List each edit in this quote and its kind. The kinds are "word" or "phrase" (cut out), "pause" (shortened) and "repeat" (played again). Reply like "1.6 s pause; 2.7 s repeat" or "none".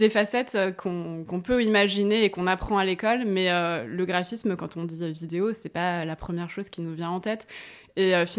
none